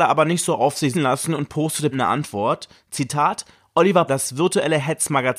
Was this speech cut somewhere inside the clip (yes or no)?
yes